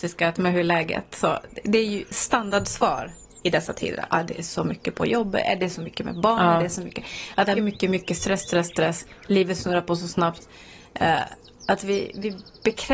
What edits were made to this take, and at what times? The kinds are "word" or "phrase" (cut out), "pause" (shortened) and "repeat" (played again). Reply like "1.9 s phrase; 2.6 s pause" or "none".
7.6 s word